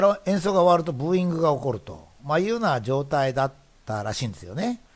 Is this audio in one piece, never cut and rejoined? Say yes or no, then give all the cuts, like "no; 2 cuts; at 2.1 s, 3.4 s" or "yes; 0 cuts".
yes; 0 cuts